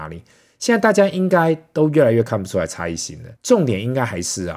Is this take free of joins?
no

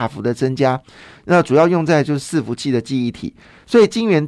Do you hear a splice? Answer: no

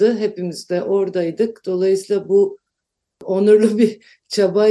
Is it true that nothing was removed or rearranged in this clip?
yes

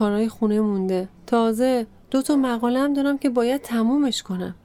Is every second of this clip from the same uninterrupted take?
no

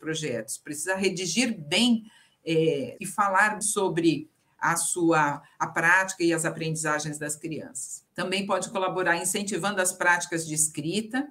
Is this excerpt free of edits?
no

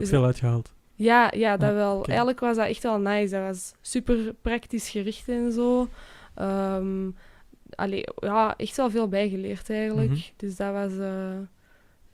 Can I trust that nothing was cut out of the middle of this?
yes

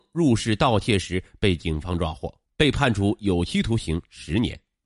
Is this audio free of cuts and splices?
no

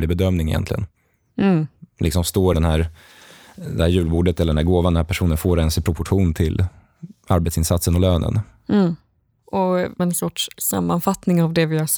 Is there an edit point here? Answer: yes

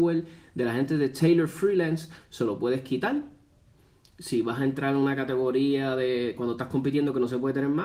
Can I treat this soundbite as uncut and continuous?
yes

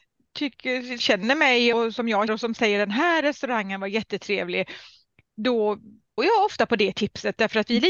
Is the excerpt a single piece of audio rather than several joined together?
no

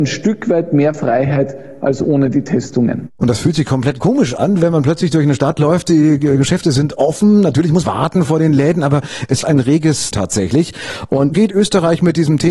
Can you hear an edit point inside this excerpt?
yes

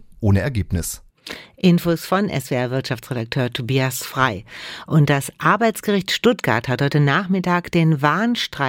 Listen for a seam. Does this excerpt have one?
no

